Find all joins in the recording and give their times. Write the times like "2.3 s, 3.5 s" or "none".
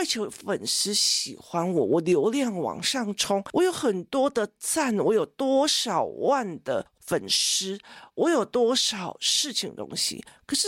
none